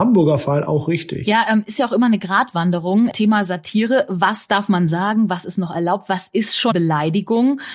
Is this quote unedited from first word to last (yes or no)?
no